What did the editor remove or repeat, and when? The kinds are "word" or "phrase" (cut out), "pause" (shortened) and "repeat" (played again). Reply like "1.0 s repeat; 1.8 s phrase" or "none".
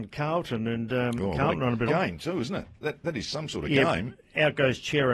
1.9 s phrase